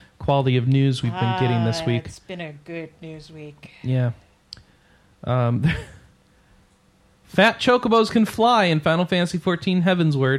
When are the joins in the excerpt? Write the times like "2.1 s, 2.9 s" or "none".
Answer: none